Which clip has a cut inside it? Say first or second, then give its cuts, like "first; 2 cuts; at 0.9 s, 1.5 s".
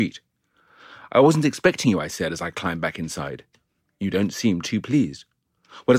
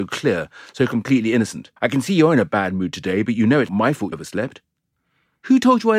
second; 3 cuts; at 1.8 s, 3.7 s, 4.1 s